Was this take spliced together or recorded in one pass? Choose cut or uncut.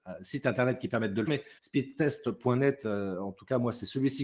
cut